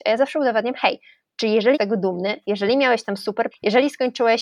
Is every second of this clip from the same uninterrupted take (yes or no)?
no